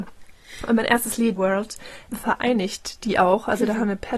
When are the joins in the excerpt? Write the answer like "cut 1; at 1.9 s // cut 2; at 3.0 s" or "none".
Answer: cut 1; at 1.4 s // cut 2; at 2.1 s